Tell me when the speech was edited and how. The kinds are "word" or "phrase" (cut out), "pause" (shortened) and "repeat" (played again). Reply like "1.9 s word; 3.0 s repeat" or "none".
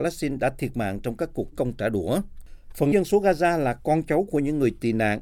1.5 s word; 2.9 s word